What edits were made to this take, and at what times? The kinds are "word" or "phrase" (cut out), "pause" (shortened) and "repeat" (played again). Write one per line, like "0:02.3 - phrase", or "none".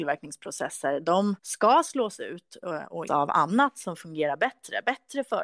0:01.4 - pause
0:03.1 - word